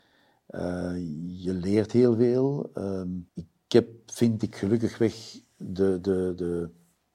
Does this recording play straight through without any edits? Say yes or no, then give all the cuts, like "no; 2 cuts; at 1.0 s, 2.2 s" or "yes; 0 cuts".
no; 1 cut; at 3.3 s